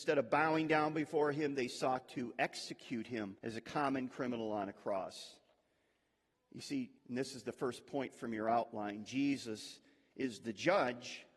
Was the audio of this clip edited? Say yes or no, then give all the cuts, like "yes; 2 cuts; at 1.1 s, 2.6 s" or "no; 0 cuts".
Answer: yes; 2 cuts; at 3.4 s, 7.0 s